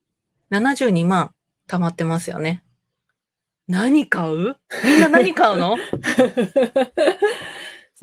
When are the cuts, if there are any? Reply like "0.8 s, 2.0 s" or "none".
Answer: none